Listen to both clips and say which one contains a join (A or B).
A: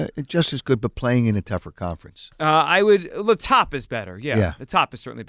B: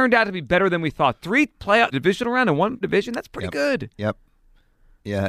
B